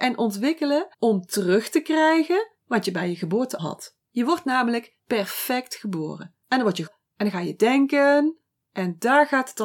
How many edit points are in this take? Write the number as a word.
seven